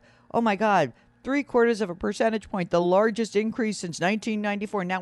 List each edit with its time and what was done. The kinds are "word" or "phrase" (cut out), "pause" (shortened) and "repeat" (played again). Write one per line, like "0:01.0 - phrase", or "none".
none

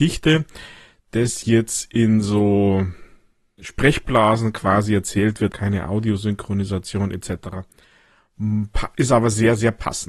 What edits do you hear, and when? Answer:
0:03.6 - word
0:05.5 - word

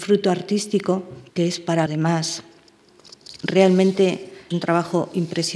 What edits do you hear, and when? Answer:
0:01.3 - pause
0:01.9 - word
0:04.5 - word

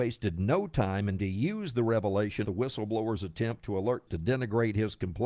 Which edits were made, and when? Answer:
0:01.2 - word
0:02.4 - word
0:04.1 - word

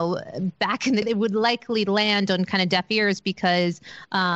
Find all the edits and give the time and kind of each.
0:01.0 - word

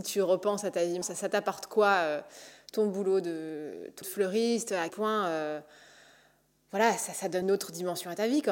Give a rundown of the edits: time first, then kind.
0:01.0 - word
0:04.0 - word
0:04.9 - word
0:07.4 - word

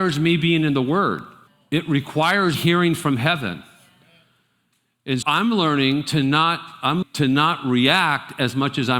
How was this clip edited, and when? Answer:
0:01.5 - pause
0:02.5 - word
0:05.2 - word
0:07.0 - word

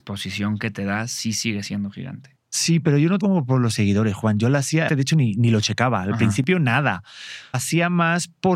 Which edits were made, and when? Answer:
0:03.2 - word
0:04.9 - word
0:07.5 - word

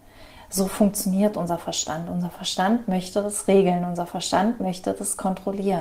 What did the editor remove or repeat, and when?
none

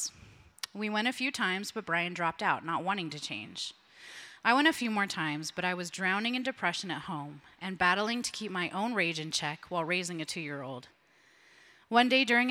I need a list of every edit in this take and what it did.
none

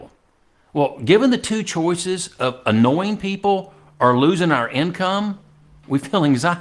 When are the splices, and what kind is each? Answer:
none

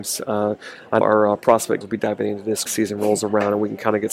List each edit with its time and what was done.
0:01.0 - word
0:01.8 - word
0:02.7 - phrase

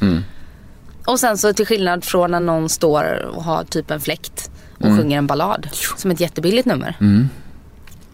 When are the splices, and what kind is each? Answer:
none

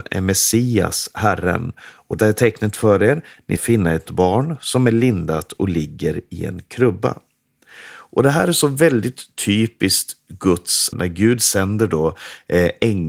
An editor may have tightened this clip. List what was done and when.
0:02.2 - word
0:03.6 - word
0:04.1 - word
0:10.9 - word

